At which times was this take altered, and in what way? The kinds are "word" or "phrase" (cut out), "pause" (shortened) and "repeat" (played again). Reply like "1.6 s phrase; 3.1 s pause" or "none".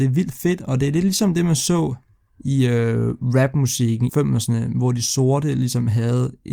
2.3 s pause; 4.1 s word